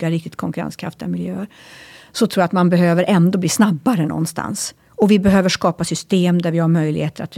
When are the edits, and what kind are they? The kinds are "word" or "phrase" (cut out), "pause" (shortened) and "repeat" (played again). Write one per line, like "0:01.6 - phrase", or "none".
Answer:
0:04.8 - pause